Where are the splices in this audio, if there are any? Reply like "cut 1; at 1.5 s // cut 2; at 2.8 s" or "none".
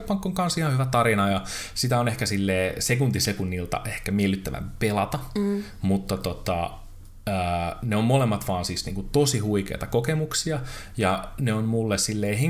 none